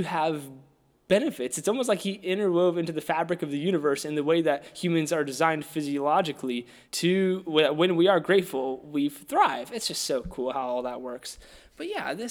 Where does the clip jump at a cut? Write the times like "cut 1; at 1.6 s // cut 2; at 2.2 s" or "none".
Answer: cut 1; at 6.8 s